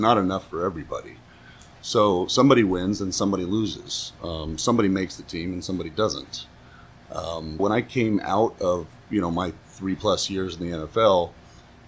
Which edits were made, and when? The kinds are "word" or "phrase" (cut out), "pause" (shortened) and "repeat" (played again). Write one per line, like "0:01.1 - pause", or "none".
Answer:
0:07.6 - word